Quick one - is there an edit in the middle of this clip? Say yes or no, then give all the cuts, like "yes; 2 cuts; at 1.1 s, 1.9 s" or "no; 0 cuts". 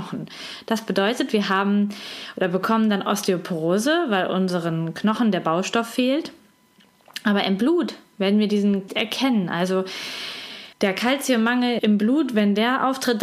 yes; 3 cuts; at 8.9 s, 10.7 s, 11.8 s